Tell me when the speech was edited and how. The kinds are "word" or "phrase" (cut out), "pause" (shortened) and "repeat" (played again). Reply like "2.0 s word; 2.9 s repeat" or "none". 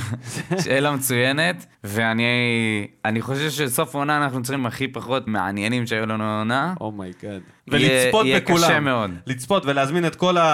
1.7 s pause; 4.6 s phrase; 5.3 s word; 7.6 s pause